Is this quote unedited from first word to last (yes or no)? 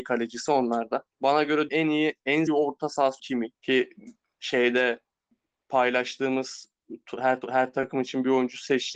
no